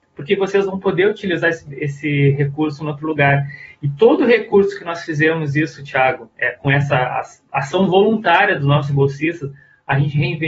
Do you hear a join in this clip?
no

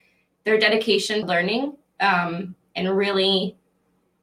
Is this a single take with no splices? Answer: no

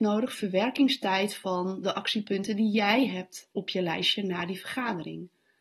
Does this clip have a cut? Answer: yes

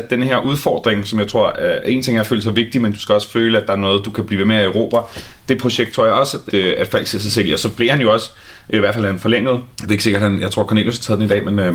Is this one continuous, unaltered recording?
no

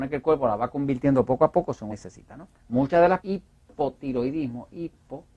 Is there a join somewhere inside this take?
yes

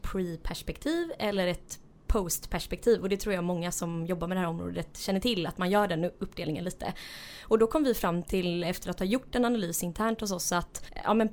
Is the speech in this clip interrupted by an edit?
no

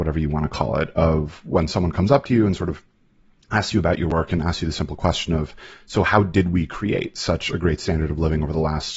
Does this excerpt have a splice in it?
no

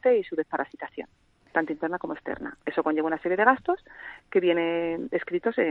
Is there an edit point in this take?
no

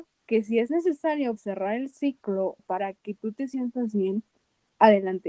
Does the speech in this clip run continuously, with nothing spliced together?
no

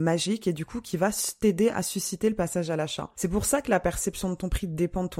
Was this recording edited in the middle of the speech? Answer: no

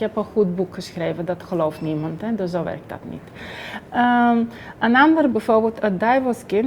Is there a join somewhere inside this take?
yes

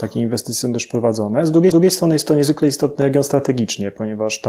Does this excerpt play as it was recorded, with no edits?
no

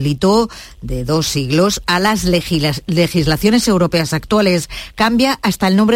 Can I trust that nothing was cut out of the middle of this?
yes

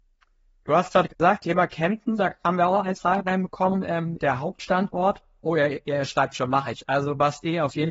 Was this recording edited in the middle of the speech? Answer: yes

